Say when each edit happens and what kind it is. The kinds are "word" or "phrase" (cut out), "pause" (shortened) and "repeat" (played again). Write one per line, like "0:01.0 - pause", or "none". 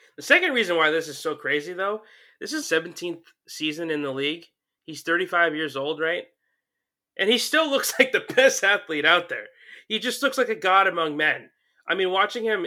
0:02.6 - word